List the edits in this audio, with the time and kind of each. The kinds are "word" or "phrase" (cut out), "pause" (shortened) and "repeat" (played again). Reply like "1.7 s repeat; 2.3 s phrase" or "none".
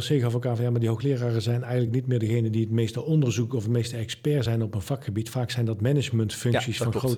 none